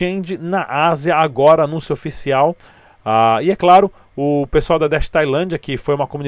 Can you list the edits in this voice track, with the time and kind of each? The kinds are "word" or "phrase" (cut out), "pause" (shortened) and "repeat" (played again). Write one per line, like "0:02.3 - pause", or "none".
none